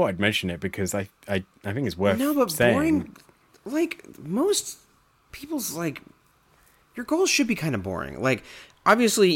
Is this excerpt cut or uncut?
uncut